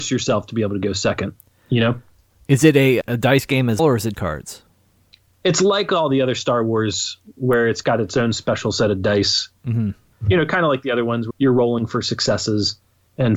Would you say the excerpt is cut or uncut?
cut